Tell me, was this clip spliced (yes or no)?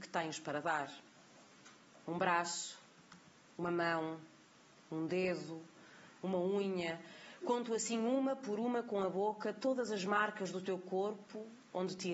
no